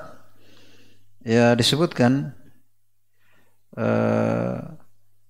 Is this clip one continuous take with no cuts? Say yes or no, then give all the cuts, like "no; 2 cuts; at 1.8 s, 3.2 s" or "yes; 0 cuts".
yes; 0 cuts